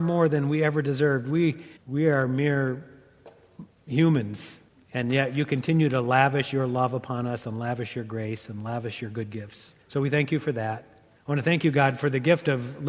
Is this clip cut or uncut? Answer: cut